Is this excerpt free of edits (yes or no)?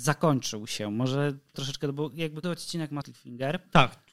no